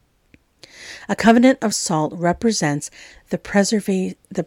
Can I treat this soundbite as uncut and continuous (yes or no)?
yes